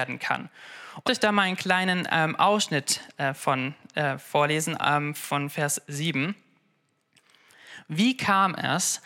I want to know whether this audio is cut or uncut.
cut